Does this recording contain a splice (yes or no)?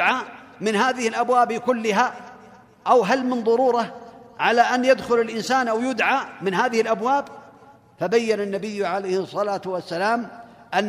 no